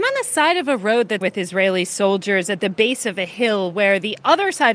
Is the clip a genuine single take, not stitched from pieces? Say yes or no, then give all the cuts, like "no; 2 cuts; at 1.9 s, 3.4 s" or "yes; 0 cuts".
no; 1 cut; at 1.2 s